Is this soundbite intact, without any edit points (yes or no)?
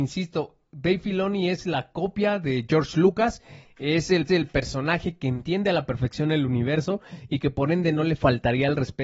no